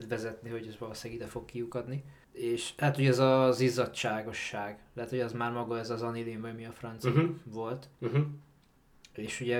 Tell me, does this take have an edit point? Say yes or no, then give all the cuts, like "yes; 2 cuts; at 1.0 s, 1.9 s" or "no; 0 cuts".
yes; 2 cuts; at 2.2 s, 7.9 s